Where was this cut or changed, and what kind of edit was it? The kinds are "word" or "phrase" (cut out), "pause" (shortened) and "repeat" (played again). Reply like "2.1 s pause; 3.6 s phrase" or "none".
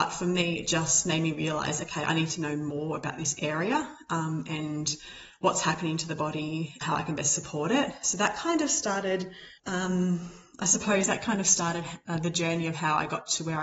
6.8 s word; 9.6 s pause